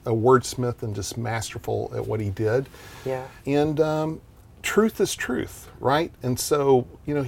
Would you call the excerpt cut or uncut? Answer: cut